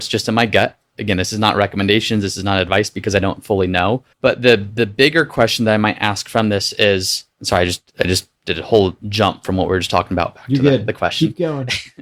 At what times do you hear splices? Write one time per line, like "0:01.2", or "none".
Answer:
0:04.1
0:07.3
0:08.4
0:09.0